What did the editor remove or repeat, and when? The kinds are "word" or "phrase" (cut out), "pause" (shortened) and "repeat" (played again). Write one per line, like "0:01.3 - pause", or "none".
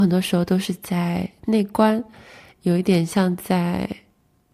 none